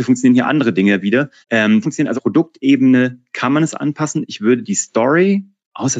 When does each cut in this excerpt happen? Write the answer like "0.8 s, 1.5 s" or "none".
1.4 s, 1.8 s, 2.2 s